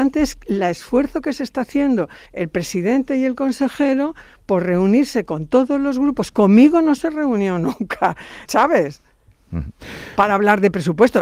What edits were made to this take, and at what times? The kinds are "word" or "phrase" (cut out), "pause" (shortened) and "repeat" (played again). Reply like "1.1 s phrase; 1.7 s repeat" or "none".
2.3 s pause; 8.5 s word